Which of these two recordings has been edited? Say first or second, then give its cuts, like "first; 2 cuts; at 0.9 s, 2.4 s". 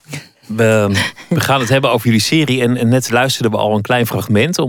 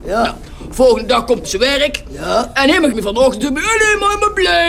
second; 2 cuts; at 1.4 s, 2.9 s